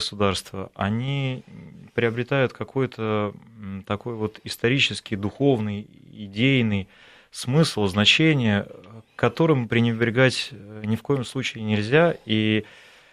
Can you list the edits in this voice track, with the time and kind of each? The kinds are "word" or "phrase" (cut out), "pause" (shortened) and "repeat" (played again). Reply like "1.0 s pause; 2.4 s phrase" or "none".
none